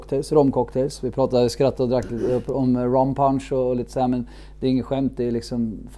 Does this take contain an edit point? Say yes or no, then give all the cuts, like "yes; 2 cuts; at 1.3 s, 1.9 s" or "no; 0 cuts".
no; 0 cuts